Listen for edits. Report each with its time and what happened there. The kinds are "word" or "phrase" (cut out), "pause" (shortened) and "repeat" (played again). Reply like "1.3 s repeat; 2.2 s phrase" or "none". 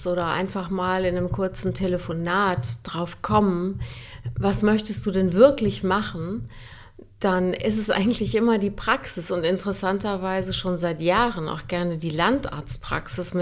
5.8 s word